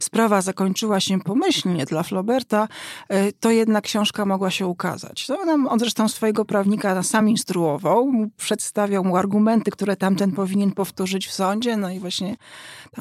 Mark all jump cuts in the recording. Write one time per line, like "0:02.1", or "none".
none